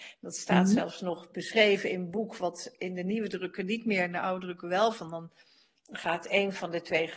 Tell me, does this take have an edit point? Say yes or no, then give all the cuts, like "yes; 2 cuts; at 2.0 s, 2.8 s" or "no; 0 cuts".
no; 0 cuts